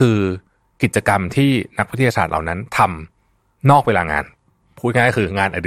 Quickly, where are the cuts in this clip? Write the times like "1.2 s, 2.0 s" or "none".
none